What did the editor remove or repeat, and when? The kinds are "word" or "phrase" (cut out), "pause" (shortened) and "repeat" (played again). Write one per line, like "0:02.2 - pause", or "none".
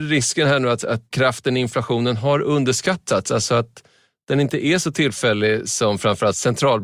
none